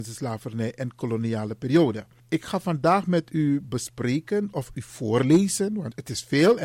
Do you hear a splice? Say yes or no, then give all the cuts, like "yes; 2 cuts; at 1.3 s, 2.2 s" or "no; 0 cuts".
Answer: no; 0 cuts